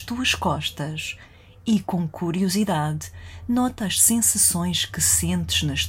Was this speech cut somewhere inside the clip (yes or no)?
no